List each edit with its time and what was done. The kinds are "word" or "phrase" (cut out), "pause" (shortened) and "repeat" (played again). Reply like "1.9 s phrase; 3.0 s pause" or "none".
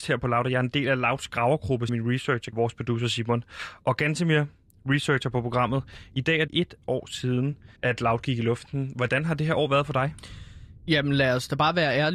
1.9 s word; 2.5 s word; 6.5 s word; 7.8 s pause